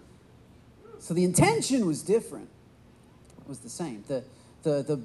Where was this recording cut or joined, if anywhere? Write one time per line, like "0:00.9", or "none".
0:03.3